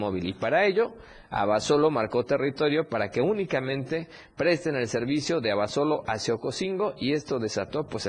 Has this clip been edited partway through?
no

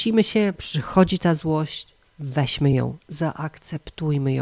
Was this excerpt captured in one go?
yes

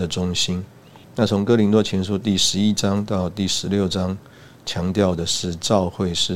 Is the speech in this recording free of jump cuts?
no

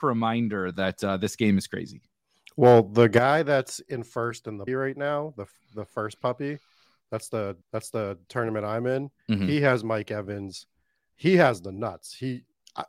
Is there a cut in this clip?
yes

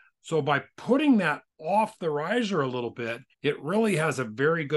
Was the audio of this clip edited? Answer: yes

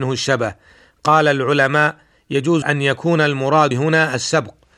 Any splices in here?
yes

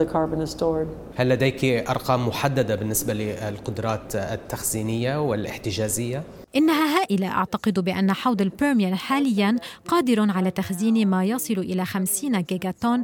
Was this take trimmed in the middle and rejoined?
yes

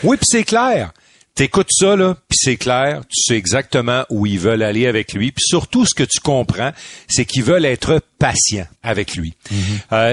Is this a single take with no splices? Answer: no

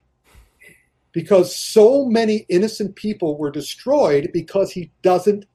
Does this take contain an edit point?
no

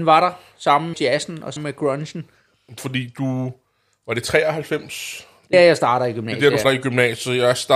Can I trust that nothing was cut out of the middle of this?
no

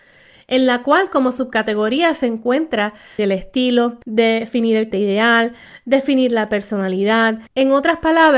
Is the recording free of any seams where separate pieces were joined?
no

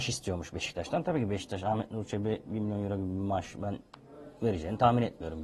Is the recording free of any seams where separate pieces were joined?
yes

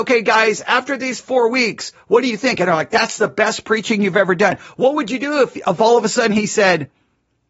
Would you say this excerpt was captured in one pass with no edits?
yes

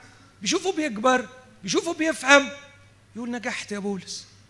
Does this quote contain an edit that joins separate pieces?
no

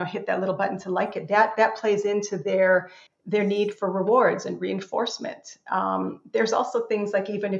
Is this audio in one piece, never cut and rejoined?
no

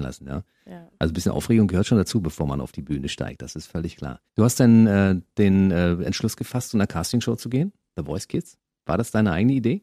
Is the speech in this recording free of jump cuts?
no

